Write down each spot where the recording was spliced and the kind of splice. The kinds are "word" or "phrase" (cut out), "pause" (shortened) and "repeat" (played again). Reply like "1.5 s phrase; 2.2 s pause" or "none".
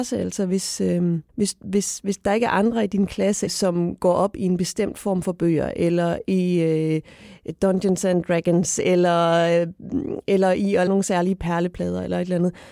1.3 s pause; 10.9 s word